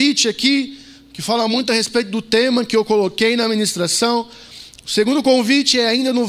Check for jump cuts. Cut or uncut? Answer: uncut